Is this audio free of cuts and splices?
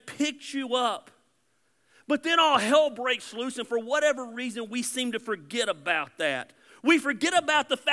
yes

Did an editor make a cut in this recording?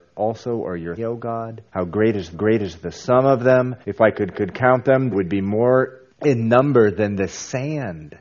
yes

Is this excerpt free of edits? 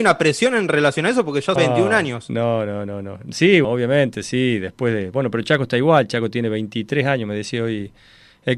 no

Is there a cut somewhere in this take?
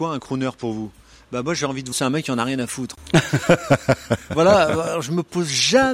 yes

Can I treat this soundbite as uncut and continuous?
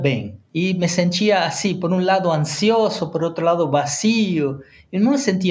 yes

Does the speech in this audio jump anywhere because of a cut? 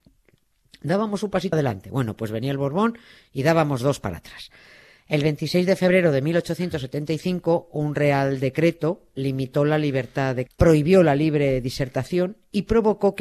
yes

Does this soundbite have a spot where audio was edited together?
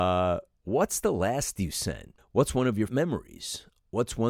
yes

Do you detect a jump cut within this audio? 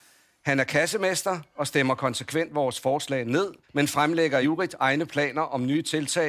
yes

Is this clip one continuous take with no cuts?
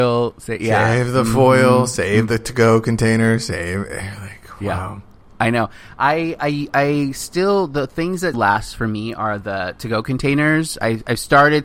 no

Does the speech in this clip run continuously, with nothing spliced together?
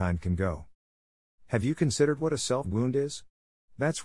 no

